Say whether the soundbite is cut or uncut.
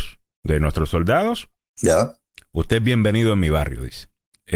uncut